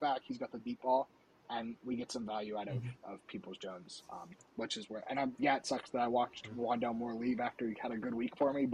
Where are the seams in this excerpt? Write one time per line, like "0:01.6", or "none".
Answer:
0:05.3